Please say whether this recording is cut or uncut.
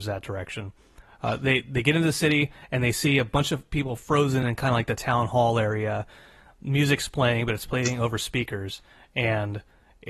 uncut